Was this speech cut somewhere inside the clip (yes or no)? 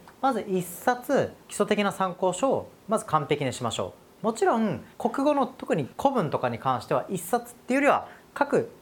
yes